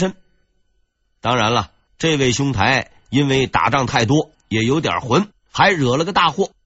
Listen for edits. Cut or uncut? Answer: cut